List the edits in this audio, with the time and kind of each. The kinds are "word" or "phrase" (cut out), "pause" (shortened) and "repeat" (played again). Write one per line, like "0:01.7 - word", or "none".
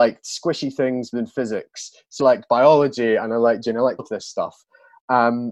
0:01.1 - word
0:02.2 - word
0:03.6 - word
0:04.0 - word